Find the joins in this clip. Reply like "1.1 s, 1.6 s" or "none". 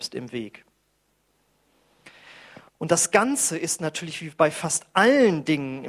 2.7 s